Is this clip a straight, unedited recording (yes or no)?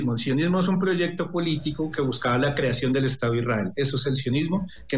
yes